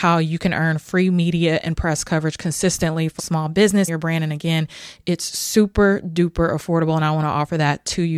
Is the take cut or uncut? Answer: cut